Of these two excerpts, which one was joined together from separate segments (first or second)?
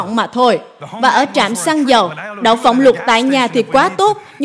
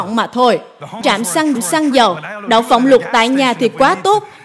second